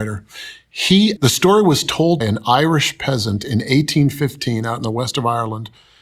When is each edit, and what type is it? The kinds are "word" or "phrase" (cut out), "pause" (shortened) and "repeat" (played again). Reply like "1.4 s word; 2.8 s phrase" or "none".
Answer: 1.2 s word; 2.2 s phrase